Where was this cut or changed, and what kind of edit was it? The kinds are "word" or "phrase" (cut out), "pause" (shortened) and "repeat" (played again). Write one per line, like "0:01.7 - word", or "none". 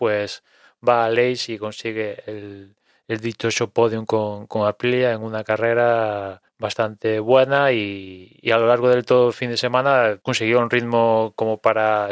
0:06.5 - pause
0:10.2 - pause